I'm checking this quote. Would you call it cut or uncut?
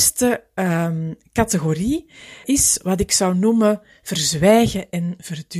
cut